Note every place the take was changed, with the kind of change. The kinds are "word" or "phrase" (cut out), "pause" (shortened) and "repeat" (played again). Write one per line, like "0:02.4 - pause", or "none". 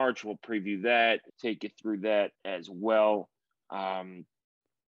0:01.3 - pause
0:02.3 - pause

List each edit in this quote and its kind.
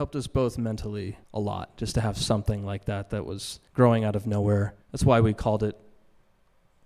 0:01.2 - pause
0:03.7 - pause
0:04.8 - pause

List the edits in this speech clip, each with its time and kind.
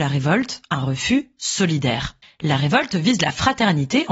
0:02.2 - pause

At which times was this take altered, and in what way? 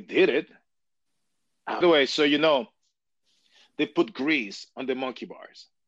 0:01.8 - phrase

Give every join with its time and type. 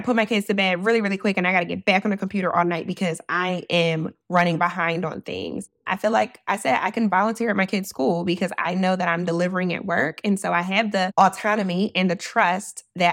none

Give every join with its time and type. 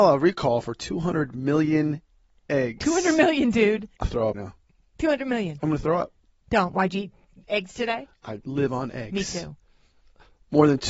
0:04.0 - word
0:04.3 - word
0:08.4 - word

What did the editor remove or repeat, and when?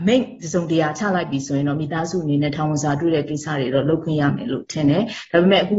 none

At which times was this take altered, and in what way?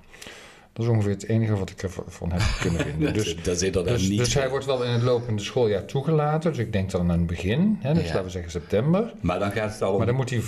none

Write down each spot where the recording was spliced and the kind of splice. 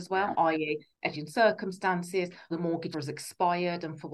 0:01.1 - word
0:02.5 - word
0:02.9 - word

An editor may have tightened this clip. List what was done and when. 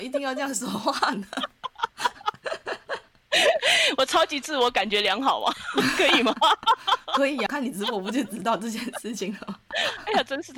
0:07.5 - word

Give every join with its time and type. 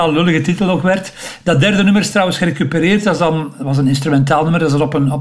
none

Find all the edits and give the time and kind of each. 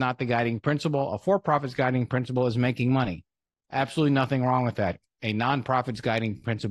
none

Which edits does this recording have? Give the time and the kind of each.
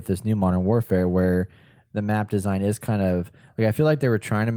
none

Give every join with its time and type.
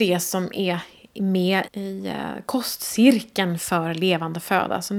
0:01.7 - word

